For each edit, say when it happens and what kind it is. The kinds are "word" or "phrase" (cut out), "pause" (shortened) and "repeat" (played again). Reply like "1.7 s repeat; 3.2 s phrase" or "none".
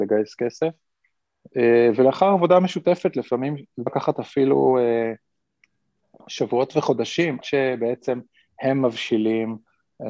3.9 s word; 7.4 s word